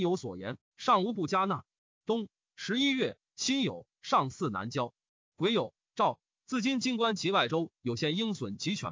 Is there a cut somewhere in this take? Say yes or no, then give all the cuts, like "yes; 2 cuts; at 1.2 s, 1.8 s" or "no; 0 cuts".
no; 0 cuts